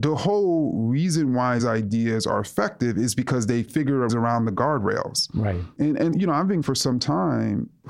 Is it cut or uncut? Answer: cut